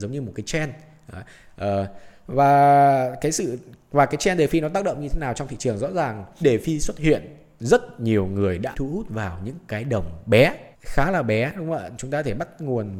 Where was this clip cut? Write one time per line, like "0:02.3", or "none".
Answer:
0:06.4
0:08.7
0:10.7

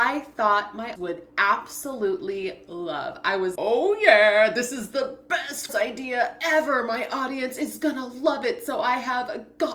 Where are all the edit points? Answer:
0:01.0
0:03.6
0:05.7

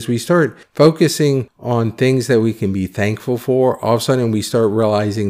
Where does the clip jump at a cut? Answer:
none

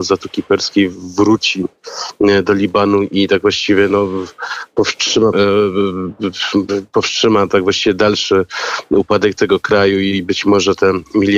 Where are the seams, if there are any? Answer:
0:05.3

